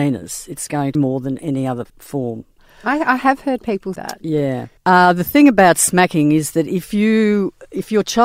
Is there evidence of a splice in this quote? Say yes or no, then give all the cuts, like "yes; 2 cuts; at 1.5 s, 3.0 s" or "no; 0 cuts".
yes; 4 cuts; at 0.9 s, 1.9 s, 4.0 s, 4.8 s